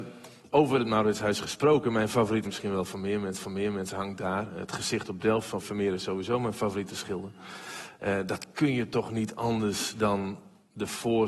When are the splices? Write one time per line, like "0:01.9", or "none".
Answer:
0:02.4
0:03.4
0:05.6